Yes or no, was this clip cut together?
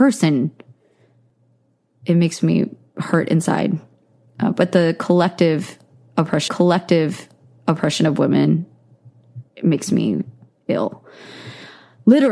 yes